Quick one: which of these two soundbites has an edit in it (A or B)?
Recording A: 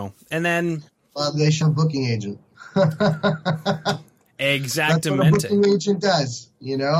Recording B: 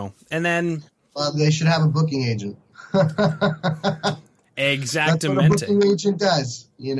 A